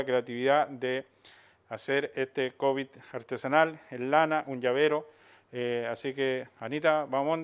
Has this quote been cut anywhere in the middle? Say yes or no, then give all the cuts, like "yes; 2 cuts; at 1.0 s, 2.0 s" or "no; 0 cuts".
no; 0 cuts